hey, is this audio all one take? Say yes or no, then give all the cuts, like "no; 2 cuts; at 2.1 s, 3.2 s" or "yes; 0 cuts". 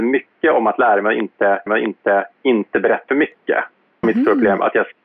no; 3 cuts; at 1.7 s, 3.1 s, 4.0 s